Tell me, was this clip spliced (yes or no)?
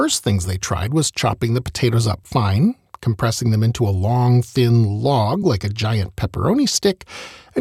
no